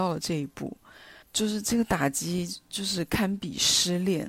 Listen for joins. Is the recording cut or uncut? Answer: cut